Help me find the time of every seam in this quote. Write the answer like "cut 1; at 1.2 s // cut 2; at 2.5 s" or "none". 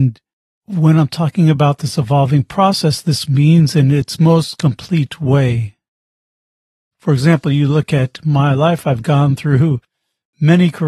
none